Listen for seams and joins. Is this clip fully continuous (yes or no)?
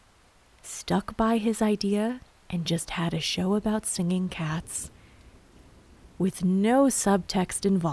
yes